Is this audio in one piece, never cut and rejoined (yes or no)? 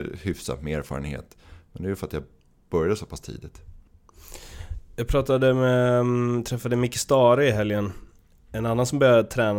yes